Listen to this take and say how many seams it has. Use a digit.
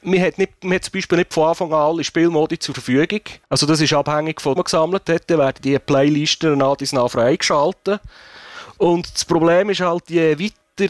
2